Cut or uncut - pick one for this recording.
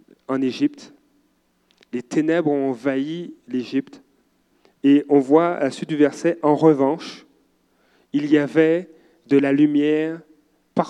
cut